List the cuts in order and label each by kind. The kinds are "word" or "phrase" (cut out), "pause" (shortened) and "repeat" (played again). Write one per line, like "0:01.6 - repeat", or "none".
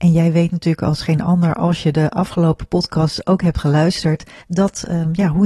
0:04.4 - pause